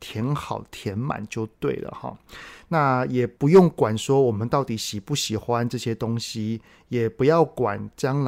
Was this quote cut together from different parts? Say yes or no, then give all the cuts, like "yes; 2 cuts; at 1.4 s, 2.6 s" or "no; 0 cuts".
yes; 1 cut; at 3.4 s